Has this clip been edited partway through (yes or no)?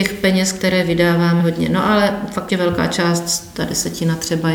yes